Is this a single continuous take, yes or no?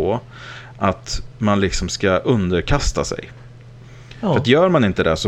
yes